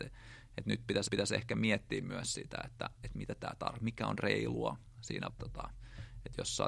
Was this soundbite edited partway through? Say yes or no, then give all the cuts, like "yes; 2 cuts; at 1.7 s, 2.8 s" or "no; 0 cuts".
yes; 3 cuts; at 1.1 s, 3.0 s, 5.3 s